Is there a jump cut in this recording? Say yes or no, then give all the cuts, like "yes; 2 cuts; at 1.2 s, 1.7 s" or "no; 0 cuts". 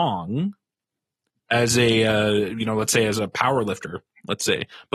no; 0 cuts